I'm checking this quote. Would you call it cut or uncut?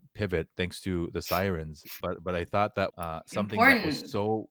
cut